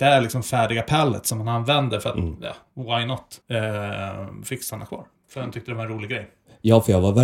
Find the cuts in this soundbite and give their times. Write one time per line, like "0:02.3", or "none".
0:03.4